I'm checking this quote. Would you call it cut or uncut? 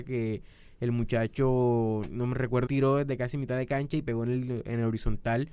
cut